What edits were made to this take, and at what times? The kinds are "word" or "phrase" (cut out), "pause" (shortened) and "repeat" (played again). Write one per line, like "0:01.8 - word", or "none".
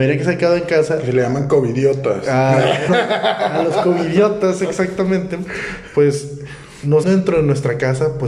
0:02.9 - word
0:07.0 - phrase